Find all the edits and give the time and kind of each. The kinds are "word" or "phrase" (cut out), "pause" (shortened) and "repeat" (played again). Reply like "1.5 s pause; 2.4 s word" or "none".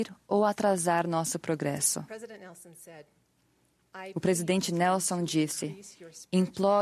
none